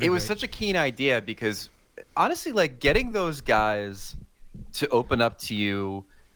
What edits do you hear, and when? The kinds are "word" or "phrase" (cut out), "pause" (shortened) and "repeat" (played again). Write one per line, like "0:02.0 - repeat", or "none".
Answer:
none

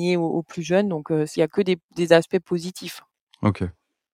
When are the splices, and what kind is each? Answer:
0:01.4 - phrase

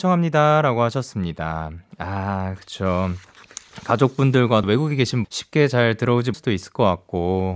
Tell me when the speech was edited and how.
0:04.6 - word
0:05.2 - word
0:06.3 - word

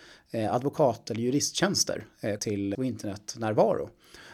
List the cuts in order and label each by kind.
0:02.4 - word
0:02.7 - word

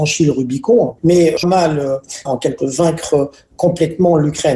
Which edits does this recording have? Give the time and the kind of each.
0:01.4 - word
0:02.3 - phrase
0:02.6 - word

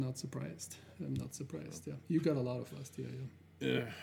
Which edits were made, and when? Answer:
0:02.7 - word

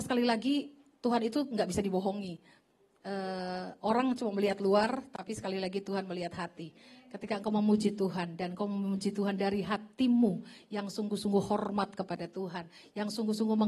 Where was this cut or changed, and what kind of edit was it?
none

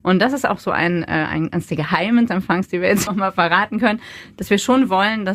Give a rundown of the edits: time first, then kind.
0:02.3 - phrase
0:03.1 - word

